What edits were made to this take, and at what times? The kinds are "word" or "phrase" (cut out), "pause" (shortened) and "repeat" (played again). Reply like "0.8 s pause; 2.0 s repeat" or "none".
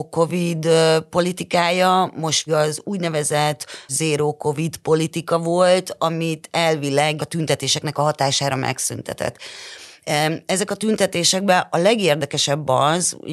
2.5 s word; 3.9 s word; 7.2 s word